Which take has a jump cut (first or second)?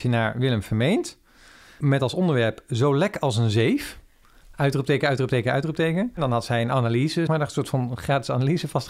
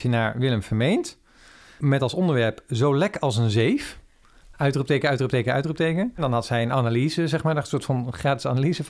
first